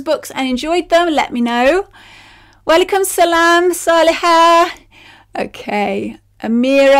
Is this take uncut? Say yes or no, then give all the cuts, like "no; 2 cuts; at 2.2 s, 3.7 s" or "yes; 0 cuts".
yes; 0 cuts